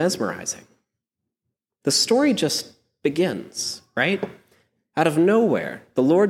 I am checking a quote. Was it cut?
no; 0 cuts

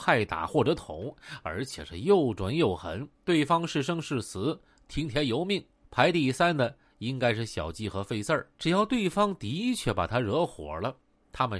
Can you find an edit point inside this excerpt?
yes; 3 cuts; at 3.1 s, 5.8 s, 8.5 s

